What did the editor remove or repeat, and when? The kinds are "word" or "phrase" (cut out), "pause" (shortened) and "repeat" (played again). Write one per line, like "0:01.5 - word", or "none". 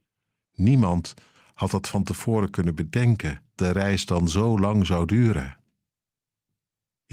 0:03.6 - word